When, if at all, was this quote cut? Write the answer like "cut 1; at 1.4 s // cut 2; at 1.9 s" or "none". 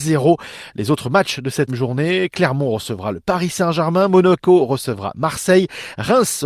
cut 1; at 1.7 s